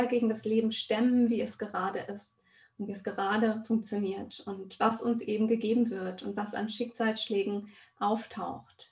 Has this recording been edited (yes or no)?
no